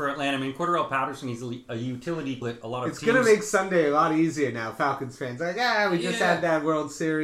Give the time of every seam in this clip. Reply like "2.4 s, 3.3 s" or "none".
2.4 s